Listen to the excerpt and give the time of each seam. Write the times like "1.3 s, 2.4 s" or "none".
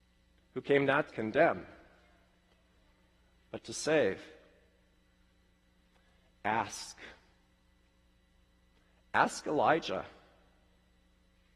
1.1 s